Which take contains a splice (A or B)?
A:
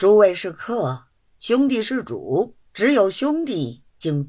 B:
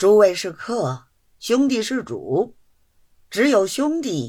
A